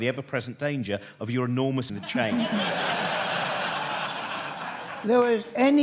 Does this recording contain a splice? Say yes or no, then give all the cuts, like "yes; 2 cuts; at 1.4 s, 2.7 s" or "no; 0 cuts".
yes; 1 cut; at 1.9 s